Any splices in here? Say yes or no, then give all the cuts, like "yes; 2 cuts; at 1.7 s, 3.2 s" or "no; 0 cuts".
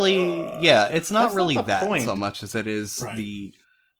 no; 0 cuts